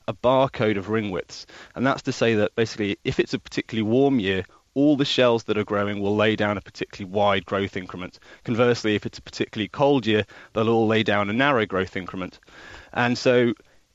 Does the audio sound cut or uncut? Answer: uncut